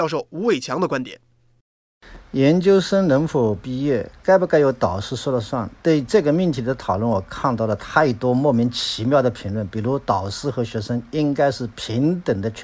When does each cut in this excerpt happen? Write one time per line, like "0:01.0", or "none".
0:05.8